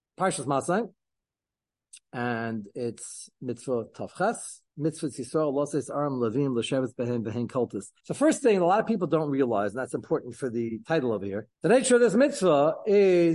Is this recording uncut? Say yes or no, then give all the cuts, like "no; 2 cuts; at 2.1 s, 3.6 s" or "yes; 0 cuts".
no; 3 cuts; at 4.7 s, 8.0 s, 11.5 s